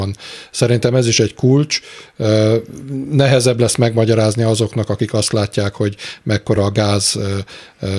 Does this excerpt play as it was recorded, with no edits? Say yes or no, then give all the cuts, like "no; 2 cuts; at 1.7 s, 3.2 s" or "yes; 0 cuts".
yes; 0 cuts